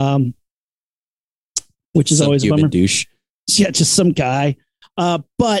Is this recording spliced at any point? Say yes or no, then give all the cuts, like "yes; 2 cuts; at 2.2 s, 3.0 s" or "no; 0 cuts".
no; 0 cuts